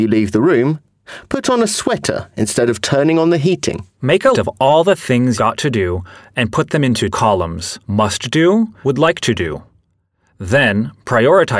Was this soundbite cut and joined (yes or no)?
yes